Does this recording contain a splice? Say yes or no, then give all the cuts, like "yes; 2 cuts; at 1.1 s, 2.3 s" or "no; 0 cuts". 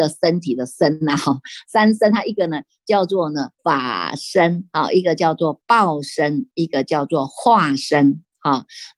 yes; 1 cut; at 3.6 s